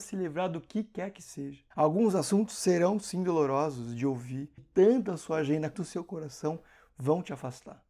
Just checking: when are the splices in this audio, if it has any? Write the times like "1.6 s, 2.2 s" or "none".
1.7 s, 4.6 s, 5.7 s